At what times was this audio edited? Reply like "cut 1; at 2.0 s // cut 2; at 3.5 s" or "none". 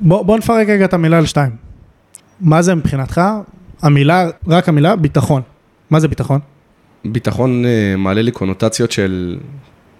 cut 1; at 2.2 s // cut 2; at 4.4 s